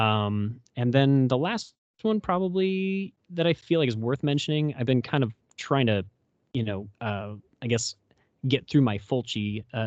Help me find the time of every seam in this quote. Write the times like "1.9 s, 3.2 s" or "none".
none